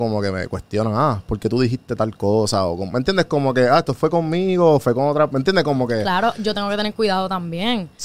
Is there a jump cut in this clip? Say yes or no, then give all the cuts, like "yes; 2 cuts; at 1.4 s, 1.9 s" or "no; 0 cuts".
no; 0 cuts